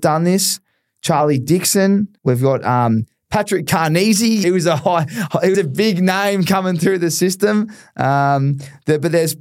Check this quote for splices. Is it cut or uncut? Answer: cut